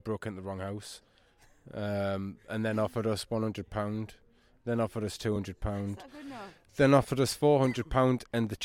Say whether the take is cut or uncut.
uncut